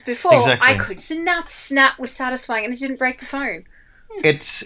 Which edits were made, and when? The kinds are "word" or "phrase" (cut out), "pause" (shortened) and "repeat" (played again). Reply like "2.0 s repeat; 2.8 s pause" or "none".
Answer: 1.0 s word; 1.5 s phrase; 2.1 s word